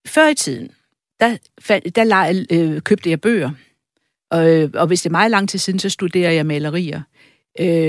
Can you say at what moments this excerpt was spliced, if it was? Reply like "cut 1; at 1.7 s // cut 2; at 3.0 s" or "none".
none